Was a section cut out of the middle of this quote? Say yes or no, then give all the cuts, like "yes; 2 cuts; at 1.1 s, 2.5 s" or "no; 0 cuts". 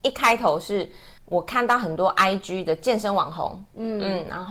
yes; 1 cut; at 1.2 s